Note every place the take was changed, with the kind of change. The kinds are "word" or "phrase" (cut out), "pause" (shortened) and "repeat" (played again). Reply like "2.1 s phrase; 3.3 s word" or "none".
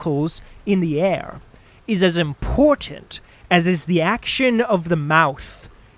none